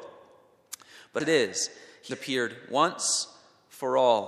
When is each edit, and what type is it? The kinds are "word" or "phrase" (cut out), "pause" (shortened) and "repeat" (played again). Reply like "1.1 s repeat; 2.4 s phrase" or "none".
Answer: 1.2 s word; 2.1 s word